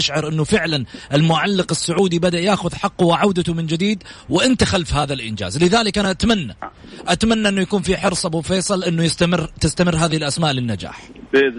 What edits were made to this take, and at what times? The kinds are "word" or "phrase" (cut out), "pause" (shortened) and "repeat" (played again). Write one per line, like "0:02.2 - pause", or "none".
none

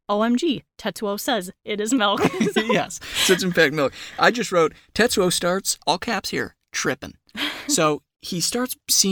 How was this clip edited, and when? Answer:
0:05.8 - pause

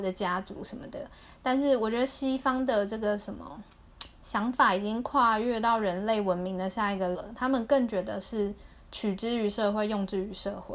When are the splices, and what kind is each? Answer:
0:07.1 - word

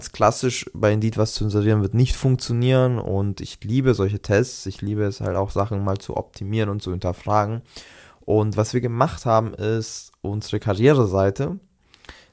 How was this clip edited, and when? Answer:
none

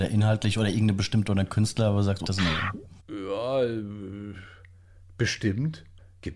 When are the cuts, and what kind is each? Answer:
0:01.3 - word
0:02.2 - word
0:03.0 - pause

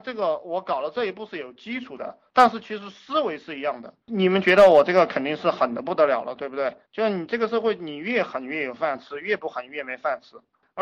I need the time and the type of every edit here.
0:04.0 - pause
0:06.9 - pause

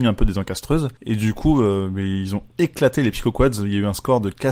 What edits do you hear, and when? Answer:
0:01.0 - pause

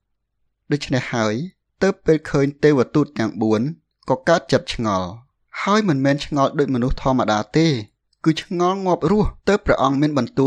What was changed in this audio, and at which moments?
0:09.4 - pause

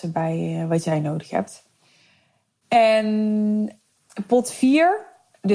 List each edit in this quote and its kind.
none

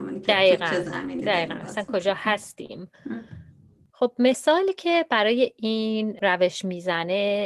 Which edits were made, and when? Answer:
0:02.9 - pause

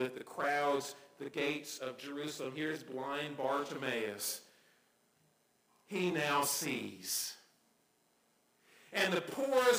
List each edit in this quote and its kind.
none

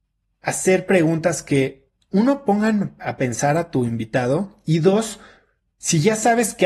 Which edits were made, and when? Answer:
none

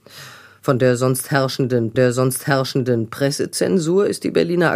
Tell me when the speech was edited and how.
0:01.9 - repeat

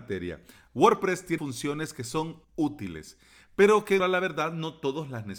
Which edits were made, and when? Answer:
0:01.4 - word
0:02.4 - pause
0:04.0 - word

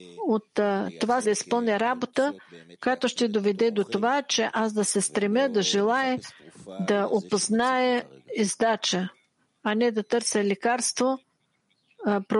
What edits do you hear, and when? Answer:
0:01.2 - word

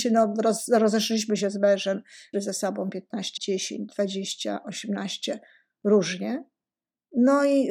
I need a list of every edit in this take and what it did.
0:02.3 - word
0:03.4 - word

